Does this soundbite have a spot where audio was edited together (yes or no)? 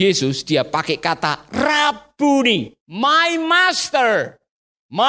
yes